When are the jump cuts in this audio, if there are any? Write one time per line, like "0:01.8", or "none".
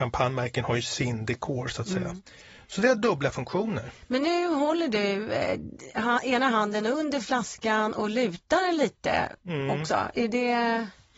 none

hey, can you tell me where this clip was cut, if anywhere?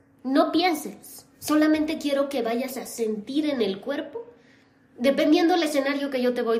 none

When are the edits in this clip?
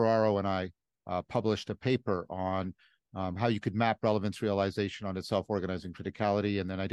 none

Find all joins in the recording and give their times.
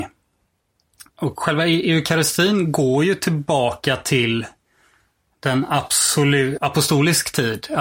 0:01.1
0:06.6

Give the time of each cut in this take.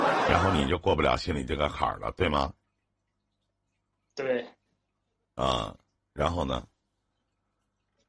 none

